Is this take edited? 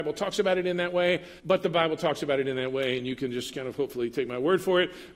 yes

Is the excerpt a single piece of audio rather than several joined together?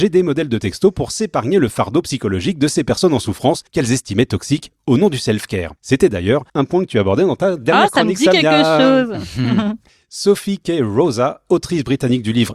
no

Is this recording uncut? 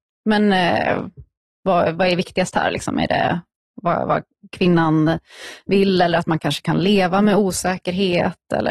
yes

